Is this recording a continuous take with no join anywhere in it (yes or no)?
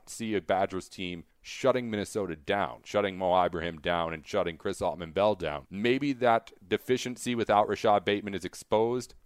no